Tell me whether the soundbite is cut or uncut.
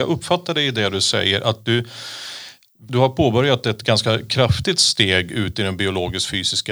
uncut